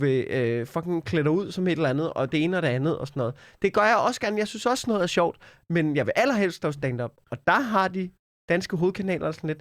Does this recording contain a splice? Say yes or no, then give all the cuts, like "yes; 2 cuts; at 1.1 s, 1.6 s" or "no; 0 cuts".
no; 0 cuts